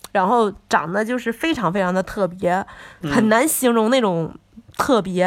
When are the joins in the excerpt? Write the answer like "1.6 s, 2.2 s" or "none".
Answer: 3.0 s